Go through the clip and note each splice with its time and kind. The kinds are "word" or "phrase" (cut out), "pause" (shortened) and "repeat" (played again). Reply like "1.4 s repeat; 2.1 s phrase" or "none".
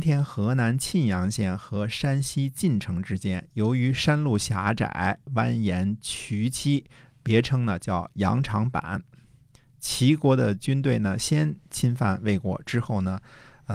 none